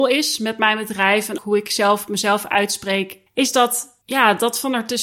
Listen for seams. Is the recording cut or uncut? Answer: cut